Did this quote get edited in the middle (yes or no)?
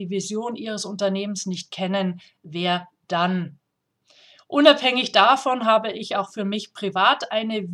no